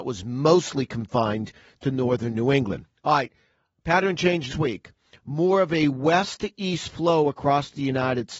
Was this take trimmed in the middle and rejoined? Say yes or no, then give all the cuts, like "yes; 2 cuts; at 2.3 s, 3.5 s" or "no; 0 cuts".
yes; 1 cut; at 4.5 s